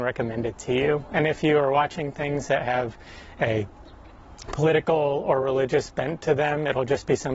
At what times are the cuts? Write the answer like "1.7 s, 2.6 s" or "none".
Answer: none